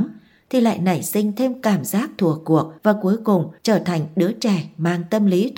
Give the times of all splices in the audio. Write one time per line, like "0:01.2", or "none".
0:02.8
0:03.6